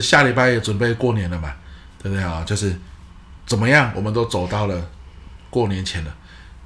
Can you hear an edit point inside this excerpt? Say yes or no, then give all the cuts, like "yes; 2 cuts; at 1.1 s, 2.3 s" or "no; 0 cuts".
no; 0 cuts